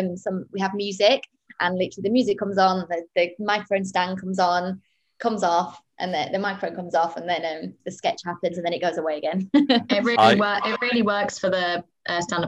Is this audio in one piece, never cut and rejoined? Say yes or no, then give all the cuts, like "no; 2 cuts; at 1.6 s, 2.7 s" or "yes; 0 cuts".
yes; 0 cuts